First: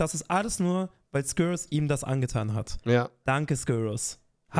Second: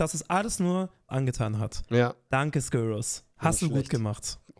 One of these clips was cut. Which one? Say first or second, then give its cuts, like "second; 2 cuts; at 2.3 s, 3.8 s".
second; 2 cuts; at 1.1 s, 3.3 s